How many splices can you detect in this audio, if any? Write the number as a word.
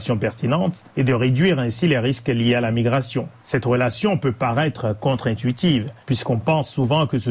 one